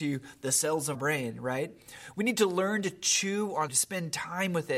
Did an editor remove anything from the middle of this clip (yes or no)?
yes